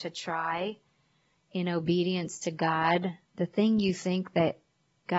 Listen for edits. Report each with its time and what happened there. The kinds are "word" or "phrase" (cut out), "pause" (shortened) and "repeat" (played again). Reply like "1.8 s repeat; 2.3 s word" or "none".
3.3 s pause